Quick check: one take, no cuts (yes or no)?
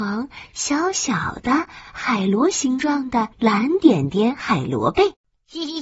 no